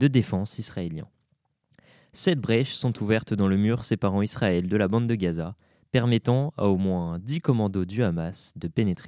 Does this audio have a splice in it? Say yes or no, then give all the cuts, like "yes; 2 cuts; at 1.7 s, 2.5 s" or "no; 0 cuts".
no; 0 cuts